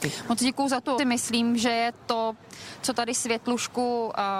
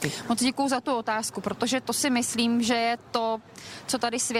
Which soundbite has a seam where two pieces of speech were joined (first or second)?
first